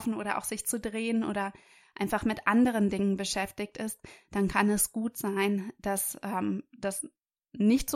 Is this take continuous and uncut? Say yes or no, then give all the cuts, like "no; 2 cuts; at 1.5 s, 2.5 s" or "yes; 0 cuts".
yes; 0 cuts